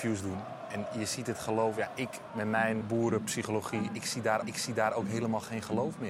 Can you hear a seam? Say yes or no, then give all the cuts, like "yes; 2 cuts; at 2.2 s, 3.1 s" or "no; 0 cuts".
yes; 2 cuts; at 2.8 s, 4.4 s